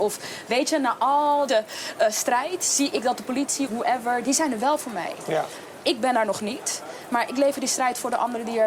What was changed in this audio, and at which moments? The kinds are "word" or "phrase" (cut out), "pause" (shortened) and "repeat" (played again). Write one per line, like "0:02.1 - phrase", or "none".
0:01.5 - word
0:03.7 - word

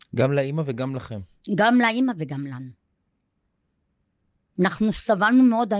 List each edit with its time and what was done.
none

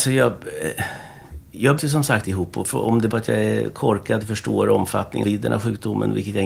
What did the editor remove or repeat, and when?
0:01.8 - word
0:02.2 - word
0:03.1 - word
0:04.2 - word
0:05.2 - word

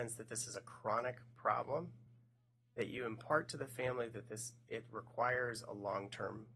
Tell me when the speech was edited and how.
none

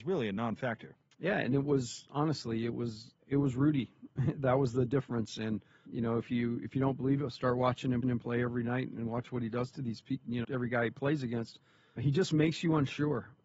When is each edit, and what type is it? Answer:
0:01.1 - pause
0:03.2 - pause
0:05.9 - word
0:08.0 - repeat
0:10.4 - word
0:12.0 - word

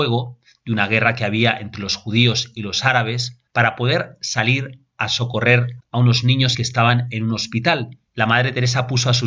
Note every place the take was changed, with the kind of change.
0:03.5 - pause
0:05.8 - word
0:06.5 - word
0:08.1 - pause

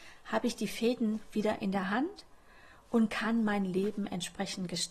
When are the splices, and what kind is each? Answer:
none

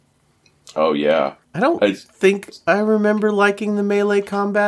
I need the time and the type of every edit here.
0:01.4 - pause

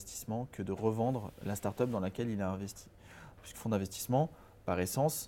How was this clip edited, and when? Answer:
0:03.5 - word

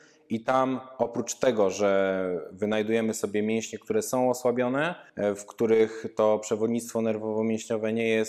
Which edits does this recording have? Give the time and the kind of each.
0:05.1 - pause

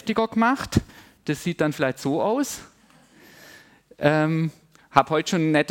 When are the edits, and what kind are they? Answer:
none

